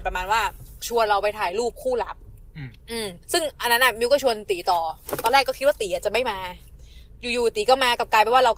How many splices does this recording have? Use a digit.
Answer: 2